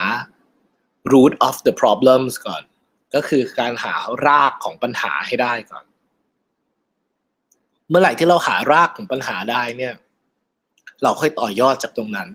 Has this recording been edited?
no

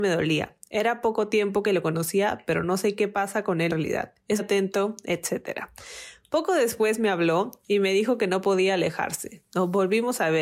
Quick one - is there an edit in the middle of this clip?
yes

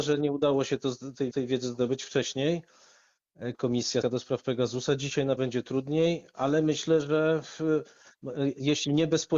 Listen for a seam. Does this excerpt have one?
yes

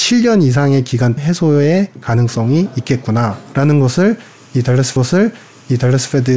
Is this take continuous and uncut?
no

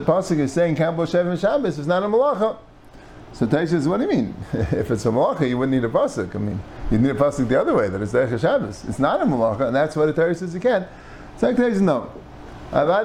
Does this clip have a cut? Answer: no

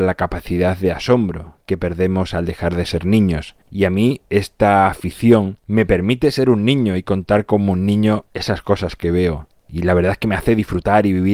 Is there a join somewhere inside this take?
yes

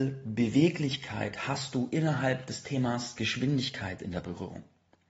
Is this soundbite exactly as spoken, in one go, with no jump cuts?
yes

